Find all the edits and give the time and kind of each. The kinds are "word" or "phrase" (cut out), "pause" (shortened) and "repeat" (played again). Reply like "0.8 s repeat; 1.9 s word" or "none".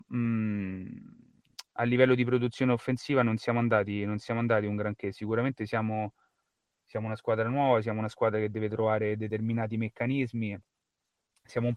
none